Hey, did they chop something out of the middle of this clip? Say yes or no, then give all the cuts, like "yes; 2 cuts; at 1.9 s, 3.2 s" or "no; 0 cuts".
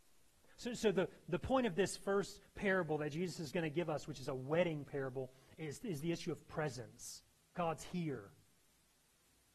yes; 1 cut; at 7.4 s